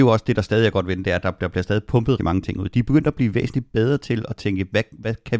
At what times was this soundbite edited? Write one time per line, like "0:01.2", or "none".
0:02.2